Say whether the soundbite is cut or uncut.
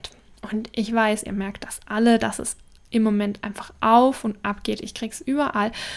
uncut